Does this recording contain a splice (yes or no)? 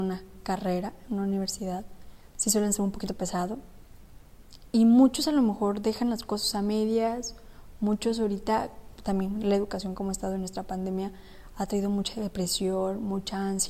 no